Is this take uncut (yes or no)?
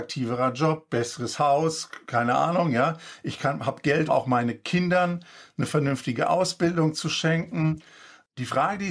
no